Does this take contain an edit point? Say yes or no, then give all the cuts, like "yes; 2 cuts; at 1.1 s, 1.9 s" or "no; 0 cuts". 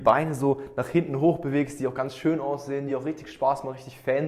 no; 0 cuts